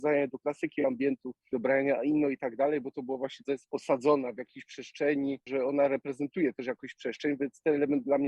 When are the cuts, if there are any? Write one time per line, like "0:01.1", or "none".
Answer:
0:03.4